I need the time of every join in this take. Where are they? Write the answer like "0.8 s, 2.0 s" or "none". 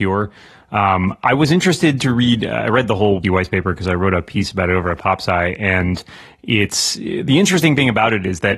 3.2 s